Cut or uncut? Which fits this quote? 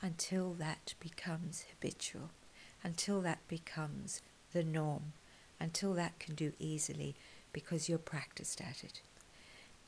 cut